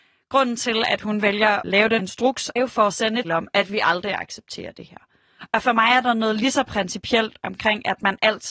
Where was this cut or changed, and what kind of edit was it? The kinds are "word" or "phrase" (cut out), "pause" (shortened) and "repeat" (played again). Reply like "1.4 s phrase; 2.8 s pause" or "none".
1.6 s word; 2.0 s word; 2.6 s word; 3.2 s word